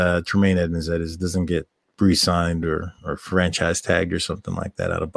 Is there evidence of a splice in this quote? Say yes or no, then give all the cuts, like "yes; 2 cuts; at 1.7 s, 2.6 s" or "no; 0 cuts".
no; 0 cuts